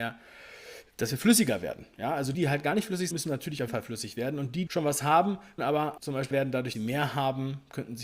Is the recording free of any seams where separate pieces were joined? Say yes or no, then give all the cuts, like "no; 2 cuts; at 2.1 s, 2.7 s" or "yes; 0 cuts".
no; 8 cuts; at 2.3 s, 3.1 s, 3.7 s, 4.7 s, 5.6 s, 6.0 s, 6.3 s, 6.7 s